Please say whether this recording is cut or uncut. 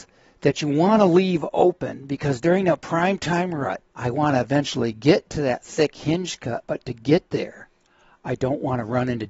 cut